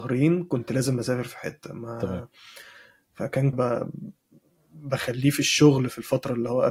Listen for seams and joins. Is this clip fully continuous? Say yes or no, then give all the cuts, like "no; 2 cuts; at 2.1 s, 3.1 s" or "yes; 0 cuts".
no; 1 cut; at 3.5 s